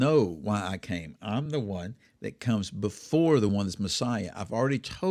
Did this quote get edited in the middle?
no; 0 cuts

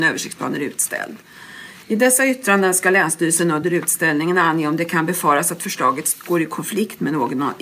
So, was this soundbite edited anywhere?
no; 0 cuts

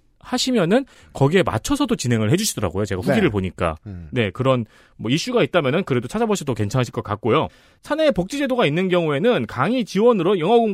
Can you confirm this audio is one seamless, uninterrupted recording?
yes; 0 cuts

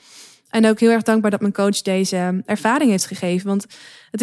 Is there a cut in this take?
no; 0 cuts

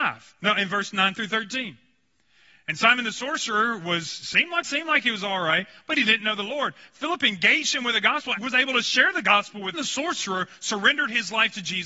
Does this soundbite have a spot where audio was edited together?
yes; 3 cuts; at 4.6 s, 8.4 s, 9.7 s

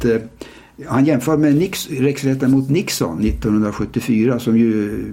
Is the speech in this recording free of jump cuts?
yes; 0 cuts

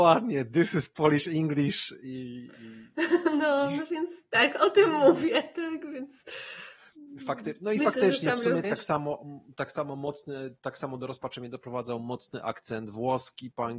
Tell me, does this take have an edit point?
yes; 1 cut; at 8.6 s

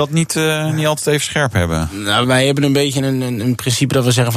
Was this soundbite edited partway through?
yes; 1 cut; at 2.2 s

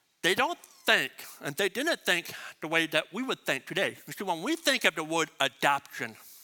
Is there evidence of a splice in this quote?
no; 0 cuts

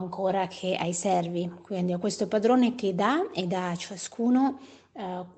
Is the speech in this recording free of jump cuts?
yes; 0 cuts

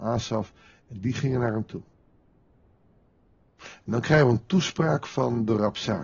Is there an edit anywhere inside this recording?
no; 0 cuts

